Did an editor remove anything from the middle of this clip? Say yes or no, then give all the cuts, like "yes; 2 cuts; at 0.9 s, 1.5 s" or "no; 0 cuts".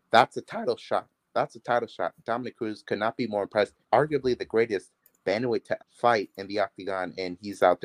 yes; 3 cuts; at 1.3 s, 3.8 s, 5.8 s